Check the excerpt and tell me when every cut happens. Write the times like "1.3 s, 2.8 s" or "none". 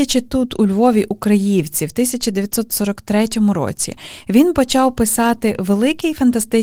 none